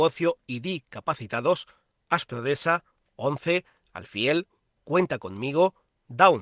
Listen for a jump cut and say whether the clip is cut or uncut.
uncut